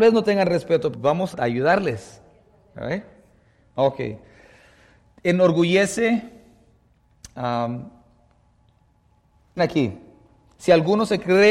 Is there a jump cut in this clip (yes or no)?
yes